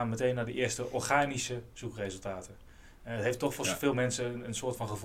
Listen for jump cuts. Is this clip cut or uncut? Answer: uncut